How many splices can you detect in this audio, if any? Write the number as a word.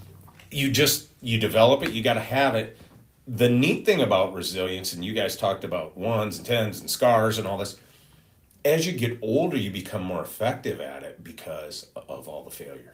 zero